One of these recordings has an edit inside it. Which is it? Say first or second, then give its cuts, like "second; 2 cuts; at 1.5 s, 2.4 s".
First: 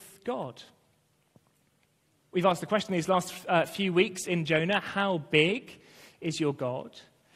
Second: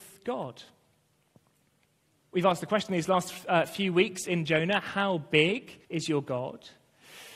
second; 1 cut; at 5.8 s